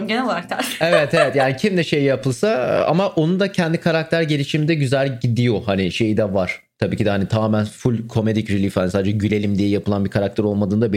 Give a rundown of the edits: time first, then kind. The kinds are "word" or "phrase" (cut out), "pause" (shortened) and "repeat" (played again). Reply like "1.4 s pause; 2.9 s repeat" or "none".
none